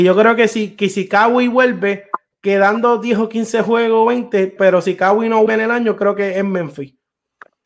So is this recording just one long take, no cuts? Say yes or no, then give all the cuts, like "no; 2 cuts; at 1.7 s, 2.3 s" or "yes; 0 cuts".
no; 2 cuts; at 4.6 s, 5.5 s